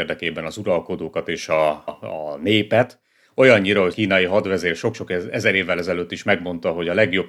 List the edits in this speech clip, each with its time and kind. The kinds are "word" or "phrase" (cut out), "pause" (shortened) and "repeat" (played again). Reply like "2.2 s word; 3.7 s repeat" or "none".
1.9 s word; 3.9 s word